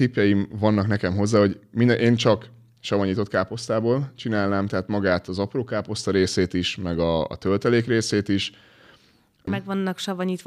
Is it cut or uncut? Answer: uncut